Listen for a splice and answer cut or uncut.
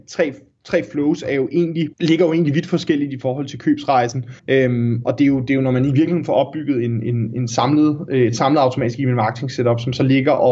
cut